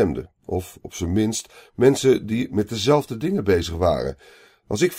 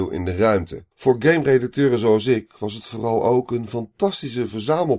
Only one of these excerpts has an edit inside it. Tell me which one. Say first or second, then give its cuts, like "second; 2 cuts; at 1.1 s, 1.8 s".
second; 1 cut; at 0.9 s